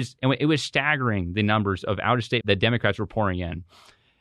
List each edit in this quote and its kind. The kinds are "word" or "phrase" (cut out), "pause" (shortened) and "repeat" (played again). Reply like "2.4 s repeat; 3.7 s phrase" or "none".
2.4 s phrase